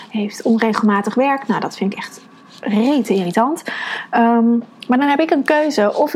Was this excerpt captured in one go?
yes; 0 cuts

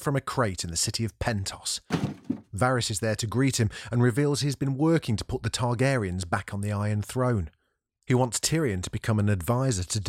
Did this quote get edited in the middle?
no; 0 cuts

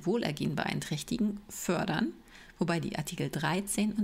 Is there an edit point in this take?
no; 0 cuts

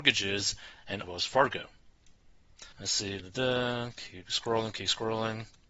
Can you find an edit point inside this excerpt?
yes; 3 cuts; at 1.0 s, 2.7 s, 3.2 s

